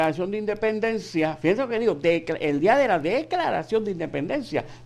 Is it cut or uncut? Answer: uncut